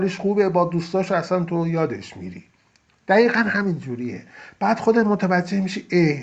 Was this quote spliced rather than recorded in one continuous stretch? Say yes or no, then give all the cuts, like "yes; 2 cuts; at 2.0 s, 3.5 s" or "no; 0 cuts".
no; 0 cuts